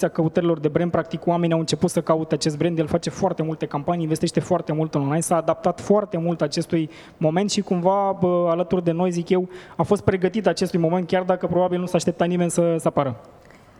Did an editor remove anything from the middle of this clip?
no; 0 cuts

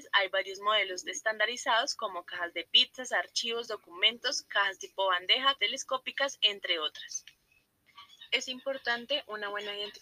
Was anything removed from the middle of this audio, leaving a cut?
yes; 1 cut; at 5.6 s

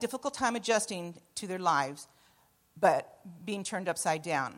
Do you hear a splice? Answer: no; 0 cuts

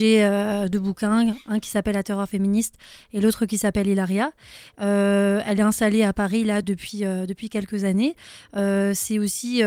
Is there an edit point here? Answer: no; 0 cuts

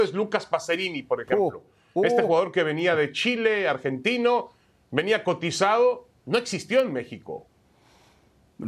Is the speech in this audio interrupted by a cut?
no; 0 cuts

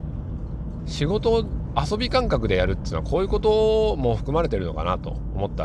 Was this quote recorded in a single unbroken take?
yes; 0 cuts

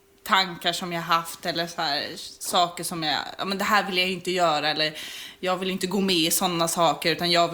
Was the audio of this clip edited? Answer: no; 0 cuts

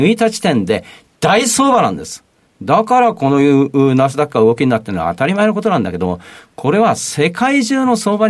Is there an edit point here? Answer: no; 0 cuts

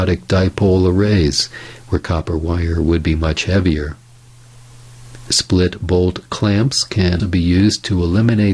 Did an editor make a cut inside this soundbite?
yes; 1 cut; at 7.2 s

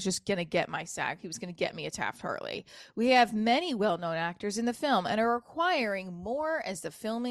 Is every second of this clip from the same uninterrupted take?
yes; 0 cuts

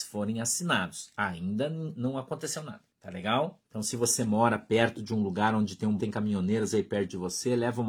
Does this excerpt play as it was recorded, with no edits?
no; 3 cuts; at 2.9 s, 3.6 s, 6.0 s

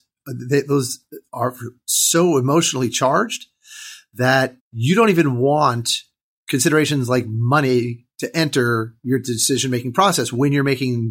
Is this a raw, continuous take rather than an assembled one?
no; 1 cut; at 4.6 s

